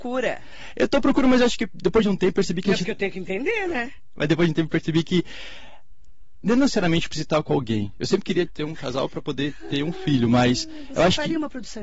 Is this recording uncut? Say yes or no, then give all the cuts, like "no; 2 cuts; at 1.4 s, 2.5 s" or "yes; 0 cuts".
no; 1 cut; at 8.5 s